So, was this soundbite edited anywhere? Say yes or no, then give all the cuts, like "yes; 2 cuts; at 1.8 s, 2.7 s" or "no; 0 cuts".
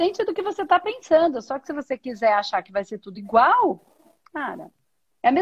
no; 0 cuts